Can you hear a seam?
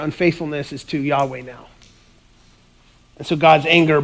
no; 0 cuts

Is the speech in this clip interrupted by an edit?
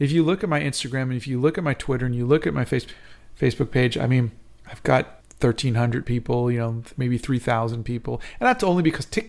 no; 0 cuts

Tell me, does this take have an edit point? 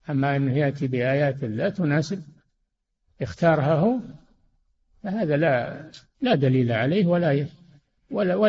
no; 0 cuts

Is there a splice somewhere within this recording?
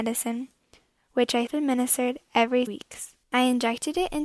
yes; 3 cuts; at 1.5 s, 2.7 s, 3.2 s

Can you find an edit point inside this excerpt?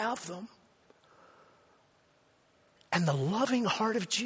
no; 0 cuts

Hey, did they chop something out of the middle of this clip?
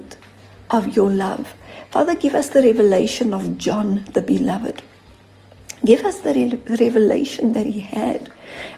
no; 0 cuts

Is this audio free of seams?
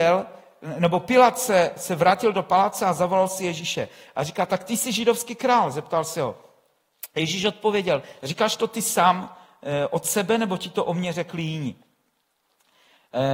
yes; 0 cuts

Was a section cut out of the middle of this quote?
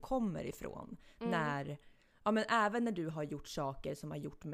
no; 0 cuts

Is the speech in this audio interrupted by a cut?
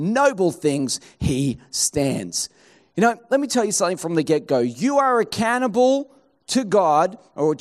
no; 0 cuts

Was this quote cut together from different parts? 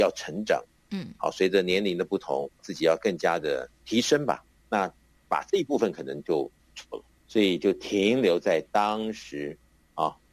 yes; 2 cuts; at 2.6 s, 4.5 s

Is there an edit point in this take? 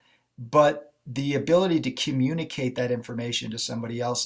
no; 0 cuts

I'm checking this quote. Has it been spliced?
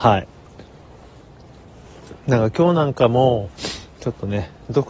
yes; 1 cut; at 2.2 s

